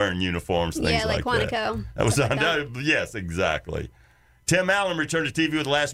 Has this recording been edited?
no; 0 cuts

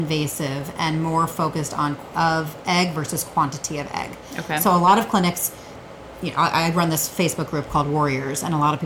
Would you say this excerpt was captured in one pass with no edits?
no; 1 cut; at 2.1 s

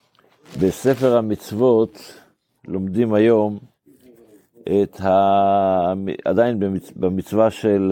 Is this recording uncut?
yes; 0 cuts

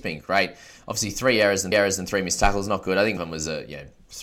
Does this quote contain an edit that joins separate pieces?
yes; 2 cuts; at 1.7 s, 3.2 s

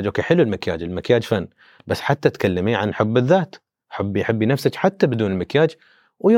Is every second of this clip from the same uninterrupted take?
yes; 0 cuts

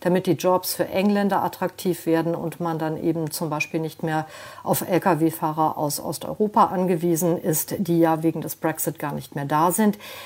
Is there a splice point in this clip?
no; 0 cuts

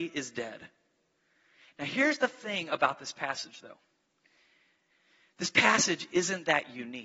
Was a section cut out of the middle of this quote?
no; 0 cuts

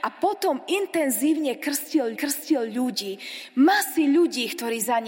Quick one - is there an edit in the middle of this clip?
yes; 1 cut; at 2.1 s

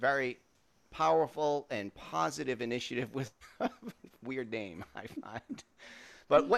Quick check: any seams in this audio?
no; 0 cuts

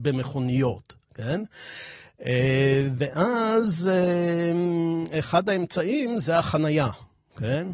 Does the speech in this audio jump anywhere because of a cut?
no; 0 cuts

